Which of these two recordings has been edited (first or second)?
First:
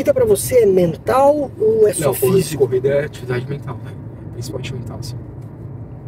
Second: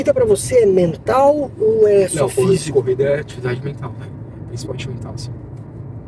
first